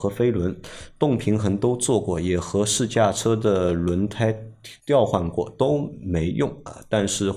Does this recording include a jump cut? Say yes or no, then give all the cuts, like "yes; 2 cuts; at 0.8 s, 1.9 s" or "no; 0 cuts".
yes; 1 cut; at 4.8 s